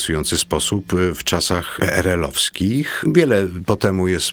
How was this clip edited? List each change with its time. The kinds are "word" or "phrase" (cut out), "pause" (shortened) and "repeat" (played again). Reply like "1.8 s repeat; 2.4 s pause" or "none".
none